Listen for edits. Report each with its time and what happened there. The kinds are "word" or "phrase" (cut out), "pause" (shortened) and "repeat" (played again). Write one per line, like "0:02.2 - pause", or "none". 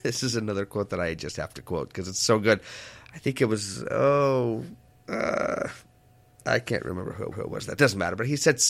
0:07.3 - repeat
0:07.8 - phrase